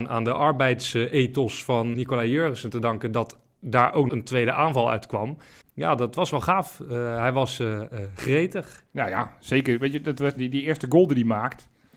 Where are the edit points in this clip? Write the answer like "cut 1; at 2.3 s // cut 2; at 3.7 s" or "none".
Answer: cut 1; at 1.9 s // cut 2; at 4.1 s // cut 3; at 5.6 s // cut 4; at 8.9 s // cut 5; at 10.4 s